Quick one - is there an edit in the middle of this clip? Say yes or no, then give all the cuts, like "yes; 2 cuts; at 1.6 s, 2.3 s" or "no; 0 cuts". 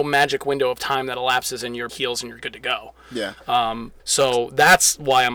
yes; 2 cuts; at 1.9 s, 4.0 s